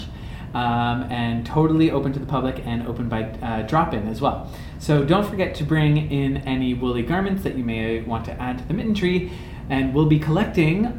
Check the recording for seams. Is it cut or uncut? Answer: uncut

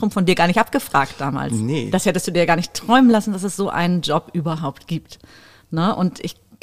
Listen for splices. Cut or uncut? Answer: uncut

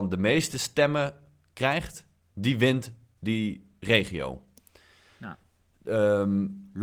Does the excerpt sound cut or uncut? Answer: uncut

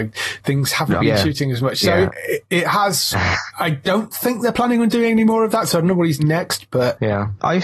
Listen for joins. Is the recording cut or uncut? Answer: cut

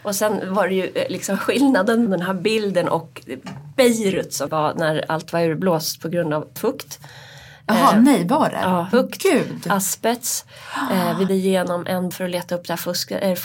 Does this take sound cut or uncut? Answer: cut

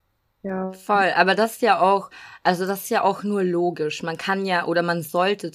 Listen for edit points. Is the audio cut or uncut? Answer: uncut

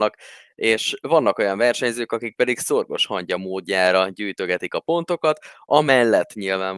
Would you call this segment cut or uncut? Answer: uncut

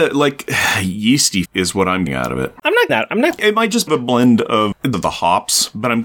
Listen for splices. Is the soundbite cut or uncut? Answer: cut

